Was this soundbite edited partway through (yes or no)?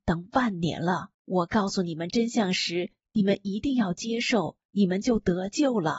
yes